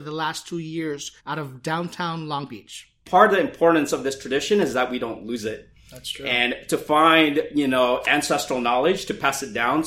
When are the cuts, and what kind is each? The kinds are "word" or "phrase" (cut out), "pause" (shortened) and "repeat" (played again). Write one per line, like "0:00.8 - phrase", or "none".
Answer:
0:01.2 - pause